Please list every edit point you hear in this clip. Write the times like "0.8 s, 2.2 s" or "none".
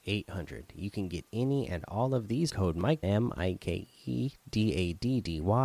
2.5 s, 3.0 s